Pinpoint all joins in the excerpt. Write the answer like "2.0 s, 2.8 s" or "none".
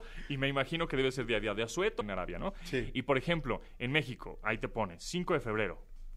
2.0 s